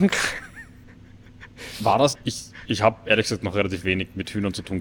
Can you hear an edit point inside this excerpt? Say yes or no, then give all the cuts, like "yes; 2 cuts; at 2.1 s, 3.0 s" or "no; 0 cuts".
yes; 1 cut; at 2.2 s